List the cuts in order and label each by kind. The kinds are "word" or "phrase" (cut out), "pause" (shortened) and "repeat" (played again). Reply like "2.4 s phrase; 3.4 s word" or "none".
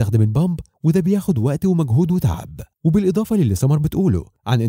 2.7 s pause